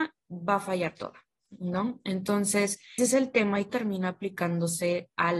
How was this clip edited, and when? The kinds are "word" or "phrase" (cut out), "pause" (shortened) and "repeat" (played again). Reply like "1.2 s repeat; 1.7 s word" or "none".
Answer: 3.0 s word; 3.7 s word